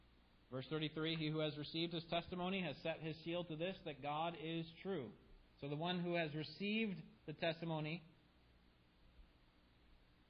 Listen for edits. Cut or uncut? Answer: cut